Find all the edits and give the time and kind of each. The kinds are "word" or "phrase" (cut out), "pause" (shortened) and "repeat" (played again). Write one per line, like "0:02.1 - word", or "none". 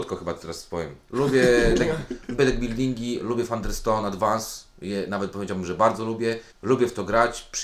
0:02.4 - word
0:06.5 - pause